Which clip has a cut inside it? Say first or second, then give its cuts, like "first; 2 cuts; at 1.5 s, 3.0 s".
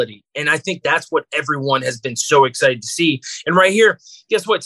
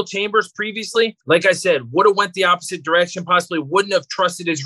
second; 1 cut; at 1.2 s